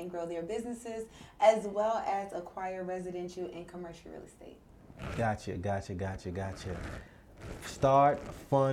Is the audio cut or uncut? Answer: uncut